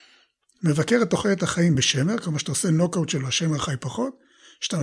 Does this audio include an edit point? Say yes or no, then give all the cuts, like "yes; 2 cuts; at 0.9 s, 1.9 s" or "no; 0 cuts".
no; 0 cuts